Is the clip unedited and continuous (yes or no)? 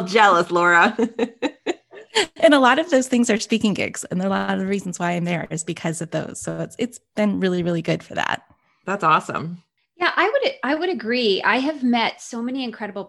yes